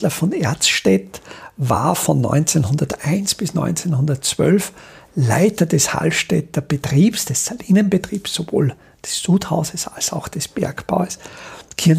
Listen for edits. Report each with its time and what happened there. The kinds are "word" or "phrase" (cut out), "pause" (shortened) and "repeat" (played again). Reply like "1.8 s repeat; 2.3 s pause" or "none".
none